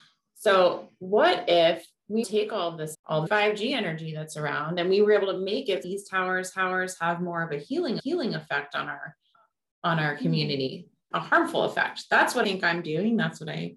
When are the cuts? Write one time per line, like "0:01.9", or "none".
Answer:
0:02.2
0:02.9
0:03.3
0:05.8
0:06.5
0:08.0
0:09.3
0:11.1
0:12.4